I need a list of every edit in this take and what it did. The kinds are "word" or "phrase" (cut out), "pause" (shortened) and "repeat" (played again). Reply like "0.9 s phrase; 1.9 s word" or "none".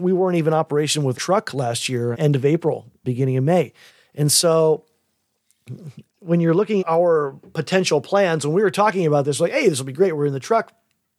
1.1 s word; 2.1 s word; 3.0 s word; 3.9 s pause; 6.1 s pause; 6.8 s word

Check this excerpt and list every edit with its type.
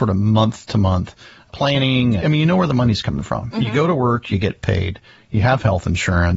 2.2 s word

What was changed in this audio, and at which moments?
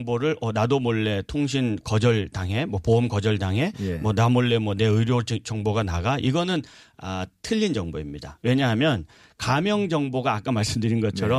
none

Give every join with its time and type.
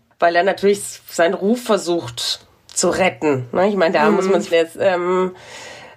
4.5 s word

